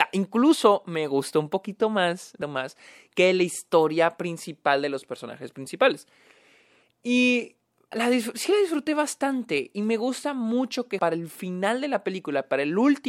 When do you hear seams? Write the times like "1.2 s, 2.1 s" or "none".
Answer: 2.4 s, 7.9 s, 11.0 s